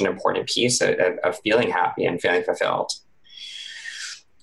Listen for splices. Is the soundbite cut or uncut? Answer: uncut